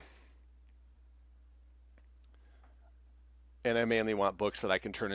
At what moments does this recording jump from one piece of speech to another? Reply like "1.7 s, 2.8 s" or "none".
none